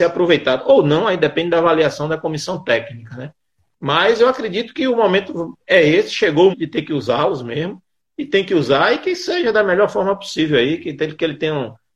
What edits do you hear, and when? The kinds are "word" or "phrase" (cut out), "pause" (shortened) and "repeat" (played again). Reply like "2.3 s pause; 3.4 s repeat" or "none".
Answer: 6.5 s word